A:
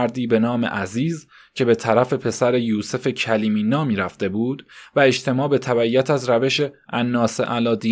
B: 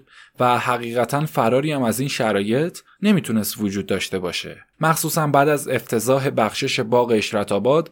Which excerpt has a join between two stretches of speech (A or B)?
B